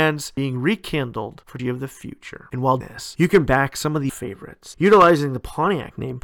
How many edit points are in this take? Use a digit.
4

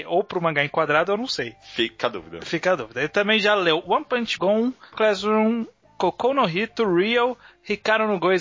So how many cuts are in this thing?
3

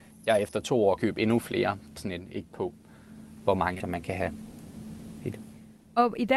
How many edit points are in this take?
4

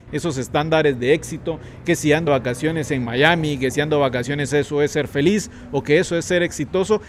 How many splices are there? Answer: 2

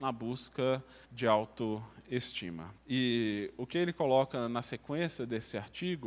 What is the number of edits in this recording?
2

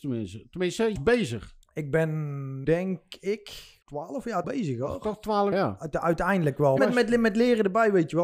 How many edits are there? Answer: 7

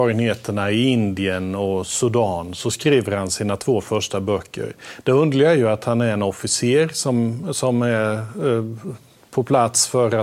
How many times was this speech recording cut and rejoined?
0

